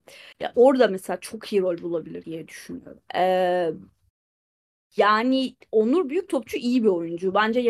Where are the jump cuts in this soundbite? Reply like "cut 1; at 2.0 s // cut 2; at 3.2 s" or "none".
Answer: cut 1; at 2.2 s // cut 2; at 3.1 s